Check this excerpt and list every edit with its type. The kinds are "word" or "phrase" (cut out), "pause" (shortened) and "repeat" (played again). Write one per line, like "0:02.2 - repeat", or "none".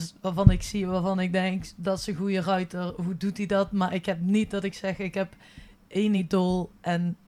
none